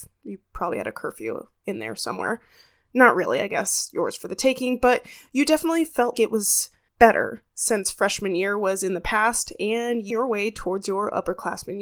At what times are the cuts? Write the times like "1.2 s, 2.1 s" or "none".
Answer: 6.1 s, 6.9 s, 10.1 s